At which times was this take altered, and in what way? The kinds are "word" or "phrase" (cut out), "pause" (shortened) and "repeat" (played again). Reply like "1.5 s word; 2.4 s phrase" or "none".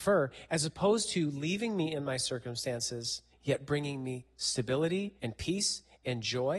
3.3 s pause; 5.2 s pause